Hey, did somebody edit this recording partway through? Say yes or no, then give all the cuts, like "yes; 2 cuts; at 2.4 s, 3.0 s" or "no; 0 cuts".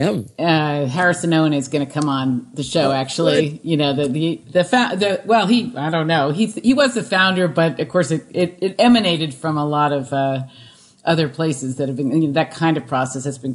no; 0 cuts